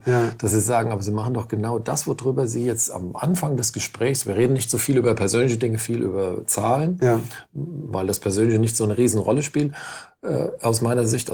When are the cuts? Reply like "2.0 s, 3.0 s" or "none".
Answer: none